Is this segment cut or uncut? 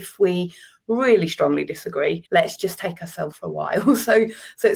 cut